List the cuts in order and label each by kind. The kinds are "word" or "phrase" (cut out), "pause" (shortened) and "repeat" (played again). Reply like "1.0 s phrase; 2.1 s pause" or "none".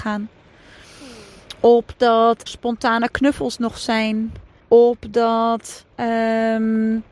2.5 s word; 4.6 s pause; 5.9 s pause